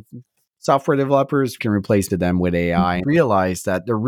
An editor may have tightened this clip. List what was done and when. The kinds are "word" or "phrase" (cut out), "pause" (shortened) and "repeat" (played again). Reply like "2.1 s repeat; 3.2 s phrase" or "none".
1.6 s word; 2.1 s word; 3.0 s word